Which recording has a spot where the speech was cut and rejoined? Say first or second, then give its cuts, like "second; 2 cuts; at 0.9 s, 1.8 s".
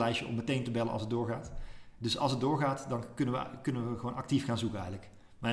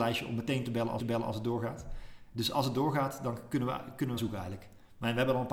second; 2 cuts; at 1.0 s, 4.2 s